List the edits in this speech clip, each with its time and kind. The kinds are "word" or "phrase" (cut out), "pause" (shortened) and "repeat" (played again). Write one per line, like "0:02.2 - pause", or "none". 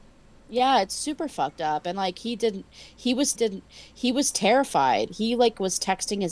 0:03.3 - repeat